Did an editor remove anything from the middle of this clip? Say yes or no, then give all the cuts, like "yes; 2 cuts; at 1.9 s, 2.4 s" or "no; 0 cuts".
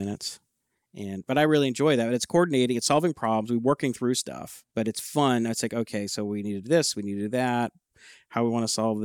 yes; 1 cut; at 4.7 s